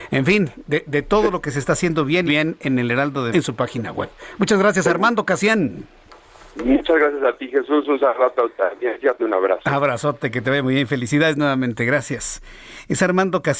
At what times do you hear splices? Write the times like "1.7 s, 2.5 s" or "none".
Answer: 2.3 s, 3.3 s, 9.2 s